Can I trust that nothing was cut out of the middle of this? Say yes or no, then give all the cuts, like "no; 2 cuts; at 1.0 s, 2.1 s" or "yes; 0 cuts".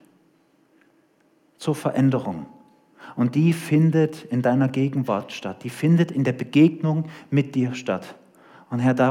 yes; 0 cuts